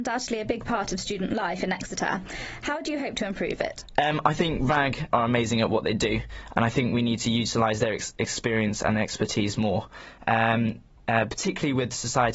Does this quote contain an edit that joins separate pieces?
yes; 1 cut; at 5.1 s

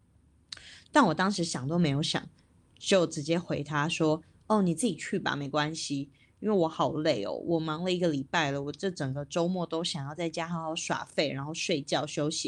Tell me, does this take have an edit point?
no; 0 cuts

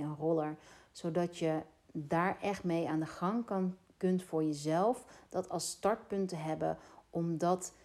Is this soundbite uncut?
yes; 0 cuts

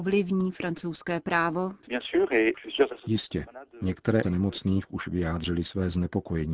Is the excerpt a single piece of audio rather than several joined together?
no; 1 cut; at 4.2 s

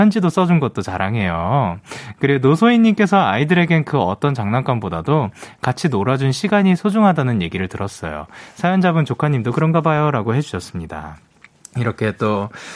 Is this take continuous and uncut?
yes; 0 cuts

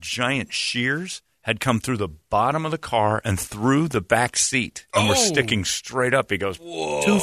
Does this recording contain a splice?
no; 0 cuts

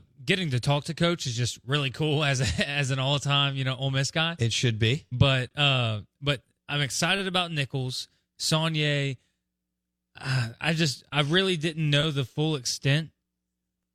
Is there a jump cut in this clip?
no; 0 cuts

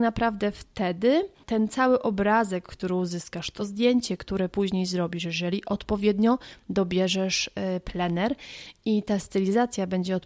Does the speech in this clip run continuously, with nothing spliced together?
yes; 0 cuts

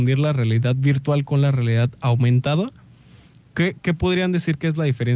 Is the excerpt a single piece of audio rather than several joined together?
yes; 0 cuts

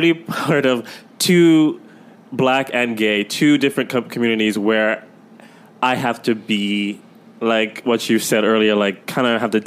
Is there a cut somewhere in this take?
no; 0 cuts

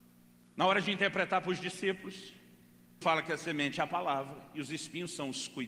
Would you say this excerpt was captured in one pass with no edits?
no; 1 cut; at 3.0 s

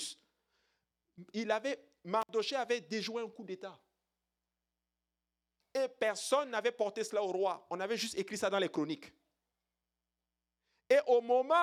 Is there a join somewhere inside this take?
no; 0 cuts

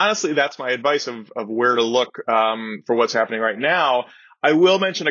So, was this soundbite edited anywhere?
no; 0 cuts

